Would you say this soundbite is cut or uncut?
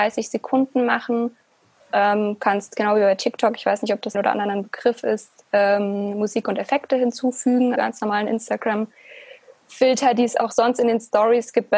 cut